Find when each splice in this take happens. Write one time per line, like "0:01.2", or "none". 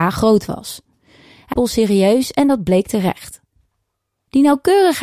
0:01.5

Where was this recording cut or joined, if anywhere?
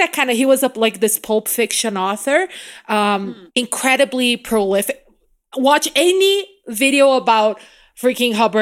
0:03.5

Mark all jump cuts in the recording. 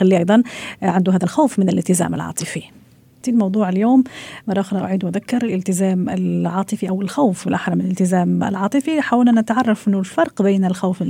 none

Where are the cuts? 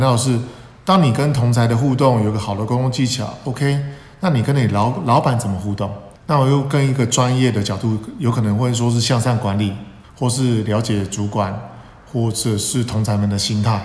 0:06.2
0:10.0

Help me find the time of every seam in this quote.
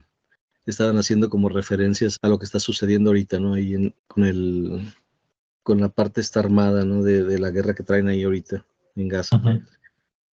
0:02.2
0:04.0
0:05.4

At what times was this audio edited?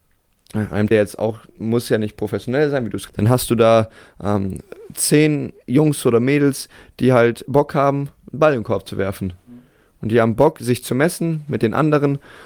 0:00.9
0:03.1

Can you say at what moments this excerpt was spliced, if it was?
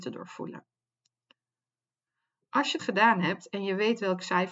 0:02.8

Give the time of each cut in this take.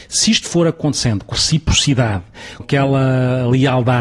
0:01.3
0:02.6

